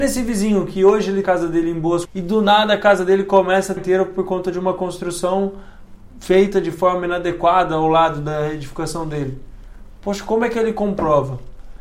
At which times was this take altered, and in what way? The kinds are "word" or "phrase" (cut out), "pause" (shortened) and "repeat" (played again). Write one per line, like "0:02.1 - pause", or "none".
0:01.2 - phrase
0:02.0 - word
0:03.8 - word